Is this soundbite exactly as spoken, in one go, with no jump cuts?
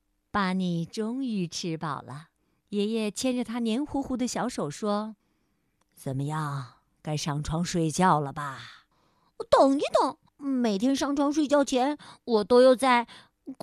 no; 4 cuts; at 2.4 s, 5.2 s, 8.9 s, 10.3 s

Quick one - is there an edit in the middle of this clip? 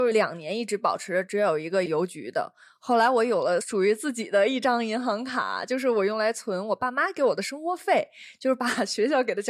no; 0 cuts

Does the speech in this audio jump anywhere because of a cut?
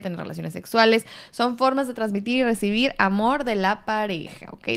no; 0 cuts

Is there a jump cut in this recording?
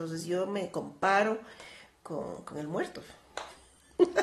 no; 0 cuts

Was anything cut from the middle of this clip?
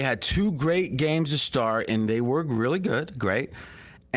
no; 0 cuts

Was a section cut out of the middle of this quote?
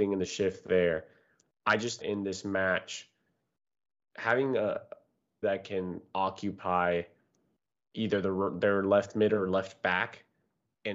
yes; 2 cuts; at 2.0 s, 5.4 s

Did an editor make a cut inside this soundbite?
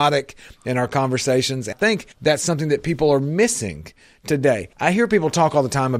yes; 3 cuts; at 1.7 s, 2.1 s, 4.7 s

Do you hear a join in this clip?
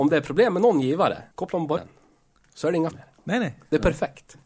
yes; 3 cuts; at 1.3 s, 1.8 s, 2.9 s

